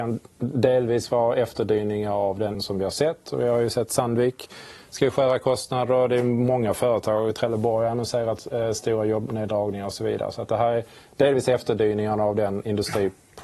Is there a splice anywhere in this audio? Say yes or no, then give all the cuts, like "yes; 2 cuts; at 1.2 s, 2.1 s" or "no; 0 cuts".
yes; 1 cut; at 2.5 s